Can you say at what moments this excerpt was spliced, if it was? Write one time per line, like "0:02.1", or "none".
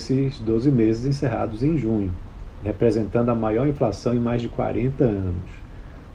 none